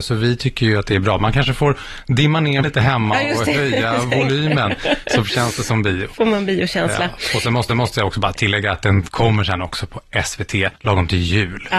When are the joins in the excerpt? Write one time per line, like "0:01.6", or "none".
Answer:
0:02.6
0:07.7
0:10.8